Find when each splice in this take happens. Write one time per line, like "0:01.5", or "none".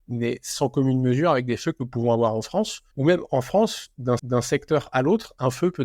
0:02.9
0:04.2